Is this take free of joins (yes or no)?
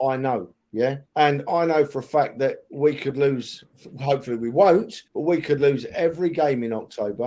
no